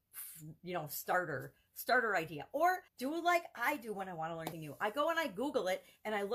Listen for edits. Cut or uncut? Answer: cut